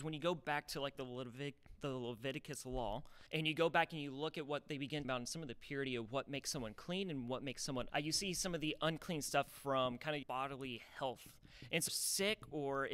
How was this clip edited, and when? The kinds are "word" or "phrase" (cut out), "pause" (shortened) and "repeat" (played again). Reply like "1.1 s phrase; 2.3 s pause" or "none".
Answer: 3.3 s pause; 5.0 s word; 7.9 s word; 9.5 s word; 10.2 s word; 11.9 s phrase